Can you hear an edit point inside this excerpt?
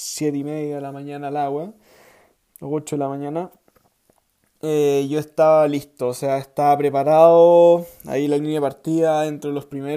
no; 0 cuts

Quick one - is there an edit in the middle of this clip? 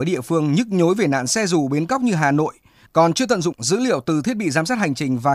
yes; 1 cut; at 3.5 s

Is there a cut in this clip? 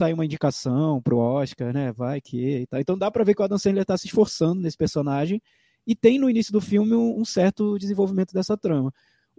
no; 0 cuts

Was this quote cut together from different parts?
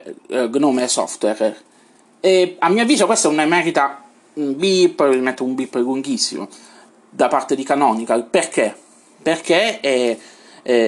no; 0 cuts

